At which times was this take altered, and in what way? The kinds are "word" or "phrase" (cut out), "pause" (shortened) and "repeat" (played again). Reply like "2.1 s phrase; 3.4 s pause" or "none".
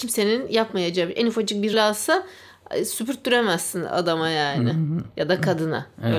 1.7 s phrase